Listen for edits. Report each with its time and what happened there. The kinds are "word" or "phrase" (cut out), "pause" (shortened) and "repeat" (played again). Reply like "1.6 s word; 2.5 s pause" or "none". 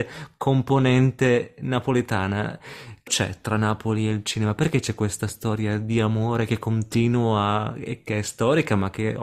3.1 s word